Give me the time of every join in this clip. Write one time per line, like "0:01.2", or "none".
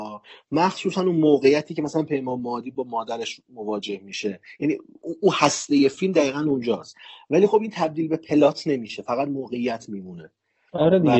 none